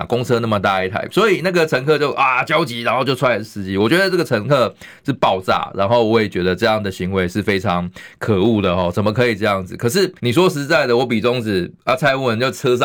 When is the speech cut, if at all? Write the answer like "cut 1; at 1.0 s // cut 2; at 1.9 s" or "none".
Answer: cut 1; at 10.2 s

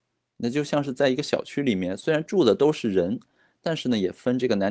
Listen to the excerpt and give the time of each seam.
none

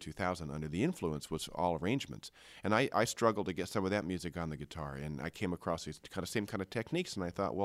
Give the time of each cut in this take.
none

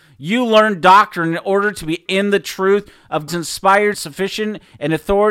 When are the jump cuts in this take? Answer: cut 1; at 2.1 s // cut 2; at 3.3 s // cut 3; at 3.9 s

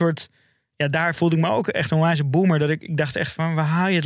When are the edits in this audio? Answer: none

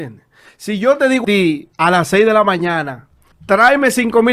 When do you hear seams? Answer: cut 1; at 1.2 s // cut 2; at 1.7 s // cut 3; at 3.3 s

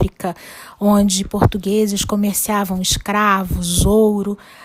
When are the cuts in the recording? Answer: none

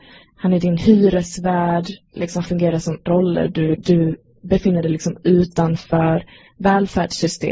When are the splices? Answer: cut 1; at 2.5 s // cut 2; at 3.1 s // cut 3; at 3.8 s

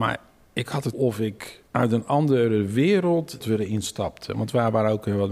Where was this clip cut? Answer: cut 1; at 0.9 s // cut 2; at 1.7 s // cut 3; at 3.4 s

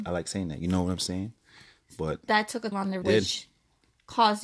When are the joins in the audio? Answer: cut 1; at 2.3 s // cut 2; at 2.7 s // cut 3; at 3.0 s

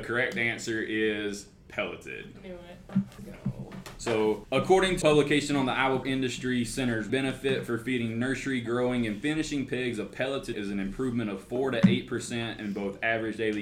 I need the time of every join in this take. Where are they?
cut 1; at 3.2 s // cut 2; at 5.0 s // cut 3; at 6.0 s // cut 4; at 7.1 s // cut 5; at 10.5 s

